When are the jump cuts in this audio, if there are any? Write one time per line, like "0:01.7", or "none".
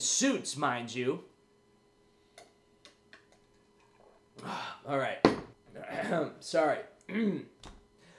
0:05.5